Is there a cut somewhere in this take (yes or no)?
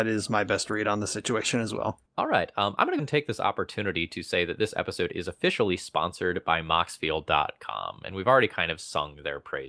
yes